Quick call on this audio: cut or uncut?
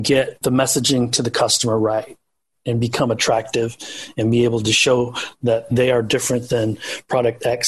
uncut